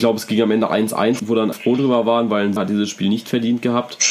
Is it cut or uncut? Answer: cut